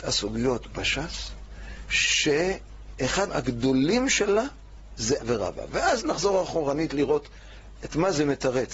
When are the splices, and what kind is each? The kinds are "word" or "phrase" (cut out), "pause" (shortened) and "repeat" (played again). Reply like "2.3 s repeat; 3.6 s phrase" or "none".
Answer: 3.3 s word; 5.2 s word